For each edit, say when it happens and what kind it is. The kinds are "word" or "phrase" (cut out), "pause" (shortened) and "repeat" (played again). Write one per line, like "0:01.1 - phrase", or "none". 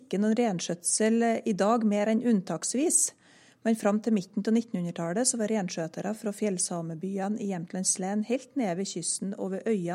none